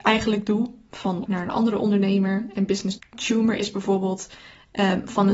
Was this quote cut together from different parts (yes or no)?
yes